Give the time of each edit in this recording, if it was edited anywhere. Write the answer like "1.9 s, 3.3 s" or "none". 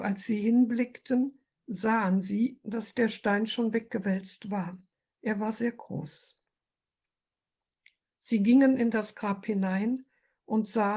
none

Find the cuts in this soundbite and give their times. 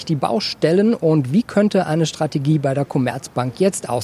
none

